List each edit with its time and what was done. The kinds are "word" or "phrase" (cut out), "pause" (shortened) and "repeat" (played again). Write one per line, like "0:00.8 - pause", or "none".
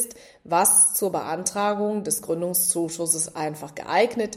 none